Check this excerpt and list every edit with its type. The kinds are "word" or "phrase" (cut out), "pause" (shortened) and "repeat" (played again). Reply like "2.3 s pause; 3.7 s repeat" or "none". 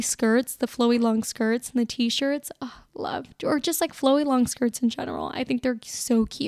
none